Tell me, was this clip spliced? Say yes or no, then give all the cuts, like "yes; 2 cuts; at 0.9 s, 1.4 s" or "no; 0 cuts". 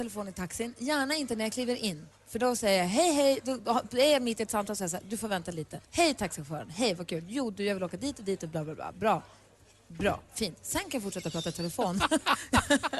yes; 1 cut; at 5.8 s